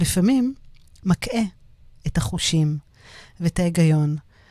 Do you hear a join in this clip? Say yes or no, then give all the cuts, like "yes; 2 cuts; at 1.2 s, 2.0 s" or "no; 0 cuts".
no; 0 cuts